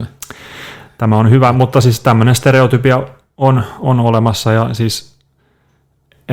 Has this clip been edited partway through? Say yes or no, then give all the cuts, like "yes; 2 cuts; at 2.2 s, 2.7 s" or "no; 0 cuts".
no; 0 cuts